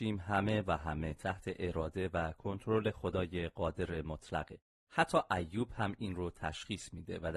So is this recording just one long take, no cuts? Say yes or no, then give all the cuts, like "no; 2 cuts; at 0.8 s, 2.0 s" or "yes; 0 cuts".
yes; 0 cuts